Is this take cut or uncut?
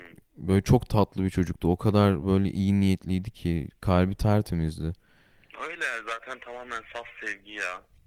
uncut